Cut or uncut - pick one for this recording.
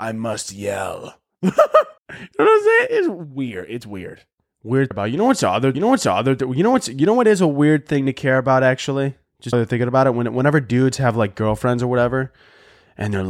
cut